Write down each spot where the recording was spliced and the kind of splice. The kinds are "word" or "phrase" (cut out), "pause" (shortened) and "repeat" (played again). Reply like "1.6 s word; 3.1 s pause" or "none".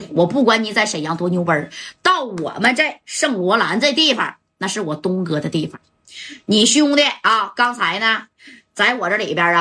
none